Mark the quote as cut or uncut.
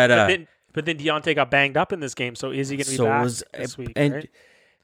uncut